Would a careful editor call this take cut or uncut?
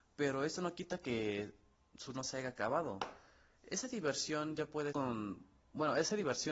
cut